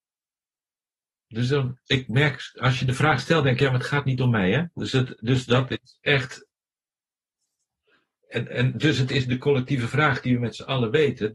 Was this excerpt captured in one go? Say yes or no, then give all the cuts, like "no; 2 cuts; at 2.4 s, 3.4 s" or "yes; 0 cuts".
yes; 0 cuts